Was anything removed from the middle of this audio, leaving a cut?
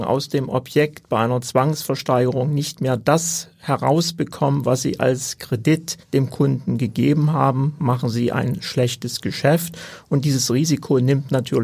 yes; 1 cut; at 6.0 s

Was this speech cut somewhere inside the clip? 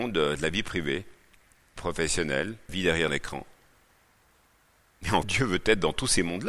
yes; 4 cuts; at 1.8 s, 2.7 s, 3.1 s, 5.2 s

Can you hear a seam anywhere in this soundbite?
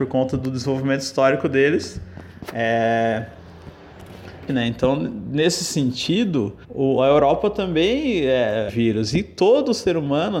yes; 3 cuts; at 4.5 s, 6.6 s, 8.7 s

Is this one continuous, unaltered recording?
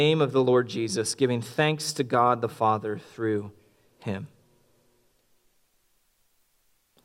yes; 0 cuts

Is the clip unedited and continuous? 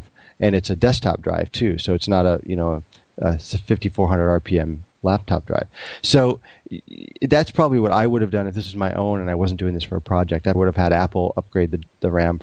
no; 1 cut; at 10.5 s

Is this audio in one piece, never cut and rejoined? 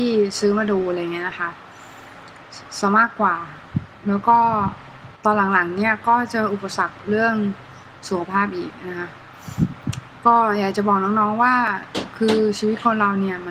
no; 1 cut; at 5.2 s

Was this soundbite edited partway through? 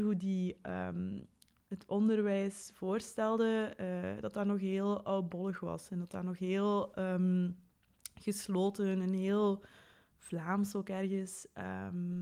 no; 0 cuts

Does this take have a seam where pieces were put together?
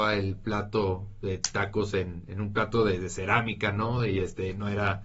no; 0 cuts

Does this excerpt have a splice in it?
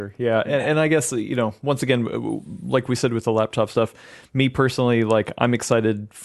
no; 0 cuts

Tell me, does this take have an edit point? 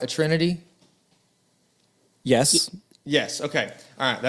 no; 0 cuts

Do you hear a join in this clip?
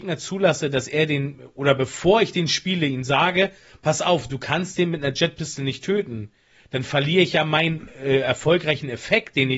no; 0 cuts

